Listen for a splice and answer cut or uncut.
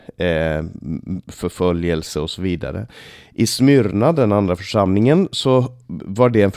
uncut